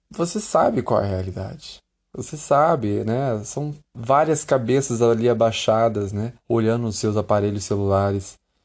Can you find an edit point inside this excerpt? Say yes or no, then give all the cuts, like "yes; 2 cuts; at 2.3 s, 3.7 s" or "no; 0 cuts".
yes; 3 cuts; at 1.9 s, 3.8 s, 6.4 s